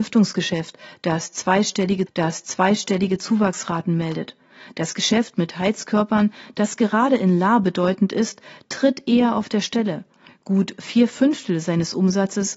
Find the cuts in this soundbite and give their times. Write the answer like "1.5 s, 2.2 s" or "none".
2.1 s